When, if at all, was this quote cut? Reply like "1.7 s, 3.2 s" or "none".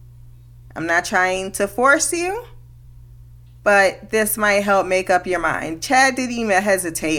none